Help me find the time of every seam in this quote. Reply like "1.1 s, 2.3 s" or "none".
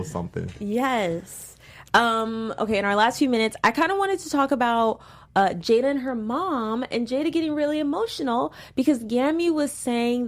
none